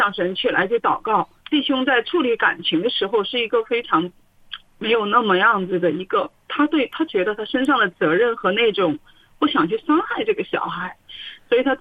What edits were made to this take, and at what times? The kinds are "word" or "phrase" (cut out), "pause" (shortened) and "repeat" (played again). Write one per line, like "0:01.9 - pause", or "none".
0:01.4 - pause